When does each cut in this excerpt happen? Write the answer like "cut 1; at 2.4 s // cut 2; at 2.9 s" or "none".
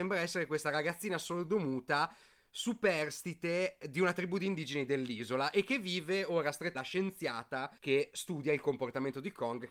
cut 1; at 6.7 s // cut 2; at 7.8 s